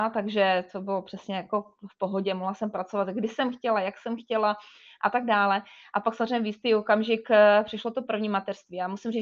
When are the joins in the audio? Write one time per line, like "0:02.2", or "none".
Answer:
none